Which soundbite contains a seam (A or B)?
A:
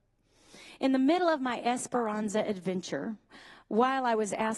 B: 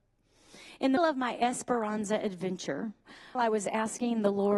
B